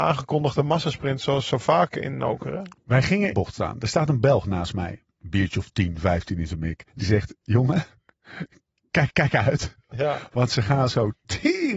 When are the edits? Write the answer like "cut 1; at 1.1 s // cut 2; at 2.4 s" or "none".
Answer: cut 1; at 3.3 s // cut 2; at 6.9 s // cut 3; at 9.1 s